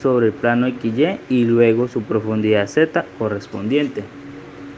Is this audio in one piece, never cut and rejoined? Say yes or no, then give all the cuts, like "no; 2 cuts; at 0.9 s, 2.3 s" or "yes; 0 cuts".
yes; 0 cuts